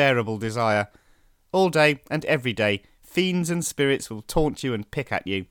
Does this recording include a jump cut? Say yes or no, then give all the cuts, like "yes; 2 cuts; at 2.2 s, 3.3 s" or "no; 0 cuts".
no; 0 cuts